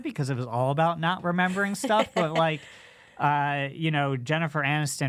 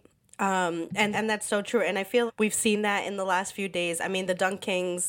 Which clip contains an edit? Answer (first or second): second